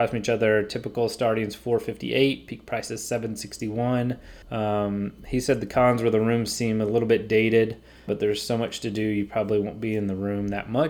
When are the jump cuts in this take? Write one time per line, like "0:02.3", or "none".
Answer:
0:04.4
0:08.1

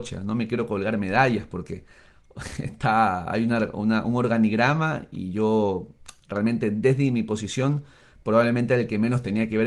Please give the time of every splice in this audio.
none

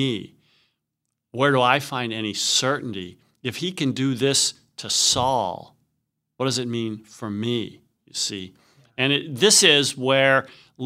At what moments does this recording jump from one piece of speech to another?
none

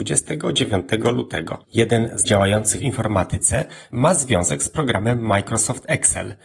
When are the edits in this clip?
0:01.6
0:02.2
0:02.8
0:03.9

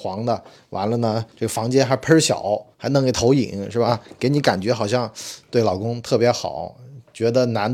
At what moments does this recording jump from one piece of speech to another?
0:01.3
0:02.7

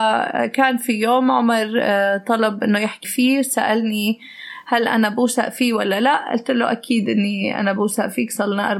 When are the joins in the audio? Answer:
0:03.0

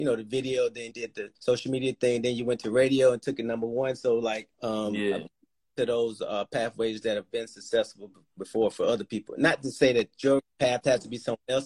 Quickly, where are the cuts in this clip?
0:00.9
0:01.4
0:04.5
0:05.8

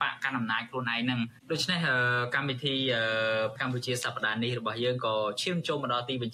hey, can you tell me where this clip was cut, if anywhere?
0:03.6

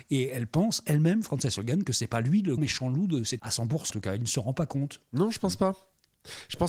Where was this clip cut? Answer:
0:02.6
0:03.4
0:03.9

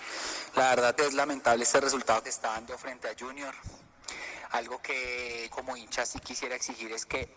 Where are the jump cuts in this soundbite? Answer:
0:01.0
0:02.2
0:05.5

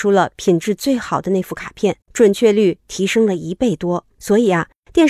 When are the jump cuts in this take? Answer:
0:02.0
0:04.1

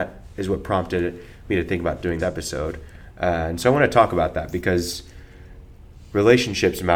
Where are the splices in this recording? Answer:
0:02.2

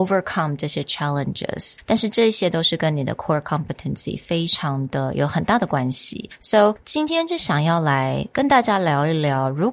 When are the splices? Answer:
none

